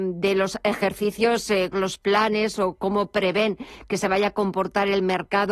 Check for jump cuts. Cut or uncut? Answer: cut